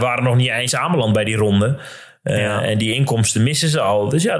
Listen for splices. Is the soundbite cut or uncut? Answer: uncut